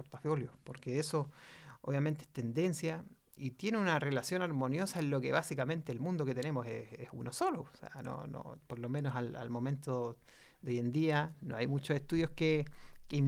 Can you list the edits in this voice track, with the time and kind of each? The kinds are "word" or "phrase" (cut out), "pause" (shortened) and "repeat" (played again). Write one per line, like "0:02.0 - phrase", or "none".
none